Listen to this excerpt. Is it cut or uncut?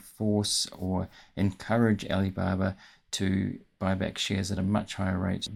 uncut